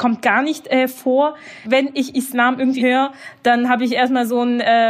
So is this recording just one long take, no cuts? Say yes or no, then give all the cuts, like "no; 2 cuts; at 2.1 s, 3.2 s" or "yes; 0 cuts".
no; 2 cuts; at 1.6 s, 2.8 s